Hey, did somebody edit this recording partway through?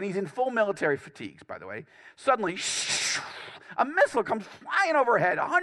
no; 0 cuts

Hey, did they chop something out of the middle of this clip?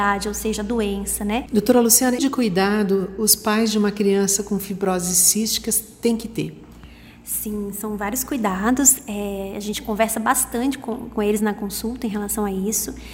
yes; 1 cut; at 2.2 s

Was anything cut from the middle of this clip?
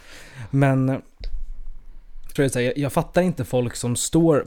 yes; 1 cut; at 2.4 s

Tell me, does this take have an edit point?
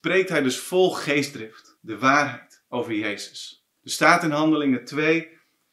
yes; 2 cuts; at 1.8 s, 3.8 s

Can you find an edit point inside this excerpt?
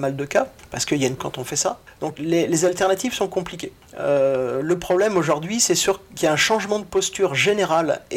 yes; 2 cuts; at 1.2 s, 2.1 s

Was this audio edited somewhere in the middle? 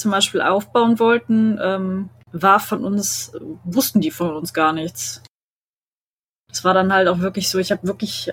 no; 0 cuts

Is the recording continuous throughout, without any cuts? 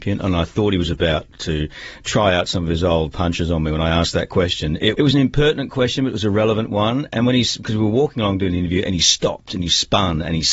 no; 1 cut; at 4.9 s

